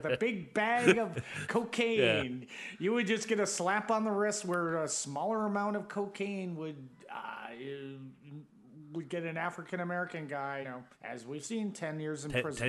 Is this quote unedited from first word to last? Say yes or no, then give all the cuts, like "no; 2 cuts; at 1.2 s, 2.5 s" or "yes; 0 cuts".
no; 2 cuts; at 10.6 s, 10.9 s